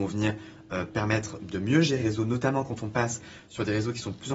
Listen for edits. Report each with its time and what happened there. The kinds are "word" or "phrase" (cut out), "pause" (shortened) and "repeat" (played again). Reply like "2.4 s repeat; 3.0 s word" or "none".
1.4 s word; 2.0 s word